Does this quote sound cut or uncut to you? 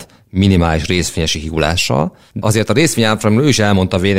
uncut